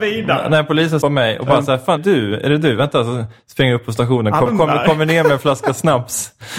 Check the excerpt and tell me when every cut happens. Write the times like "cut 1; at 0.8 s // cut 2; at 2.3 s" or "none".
cut 1; at 1.0 s // cut 2; at 2.0 s // cut 3; at 4.5 s